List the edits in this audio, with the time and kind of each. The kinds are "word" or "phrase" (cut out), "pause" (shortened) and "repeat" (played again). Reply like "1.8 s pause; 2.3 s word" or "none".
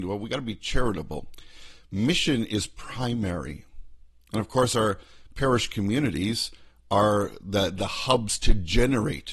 none